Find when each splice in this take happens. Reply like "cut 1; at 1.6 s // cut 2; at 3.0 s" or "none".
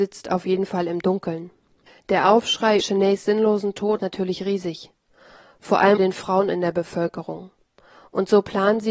cut 1; at 2.8 s // cut 2; at 4.0 s // cut 3; at 6.0 s